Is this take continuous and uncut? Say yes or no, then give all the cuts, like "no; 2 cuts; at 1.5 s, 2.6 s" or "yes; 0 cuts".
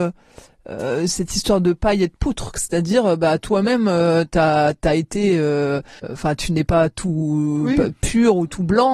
no; 1 cut; at 6.0 s